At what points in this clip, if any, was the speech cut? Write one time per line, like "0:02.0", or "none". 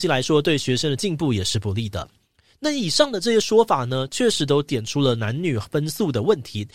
none

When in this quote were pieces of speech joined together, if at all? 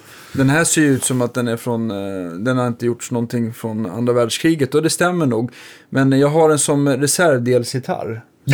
none

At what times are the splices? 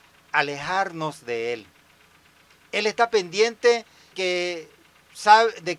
0:04.1

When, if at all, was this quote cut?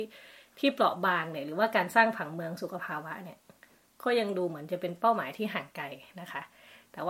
none

